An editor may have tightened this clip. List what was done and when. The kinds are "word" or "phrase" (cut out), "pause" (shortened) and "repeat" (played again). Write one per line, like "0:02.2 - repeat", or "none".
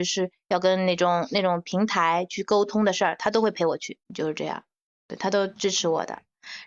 0:04.0 - pause